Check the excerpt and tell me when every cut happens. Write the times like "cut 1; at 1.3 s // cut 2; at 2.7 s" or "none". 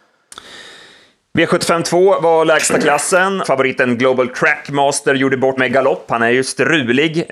cut 1; at 3.4 s // cut 2; at 5.6 s